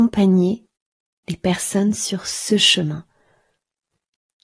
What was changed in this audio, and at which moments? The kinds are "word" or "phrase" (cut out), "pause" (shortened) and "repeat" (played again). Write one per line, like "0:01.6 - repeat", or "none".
none